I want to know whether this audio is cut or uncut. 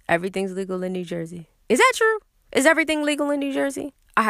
cut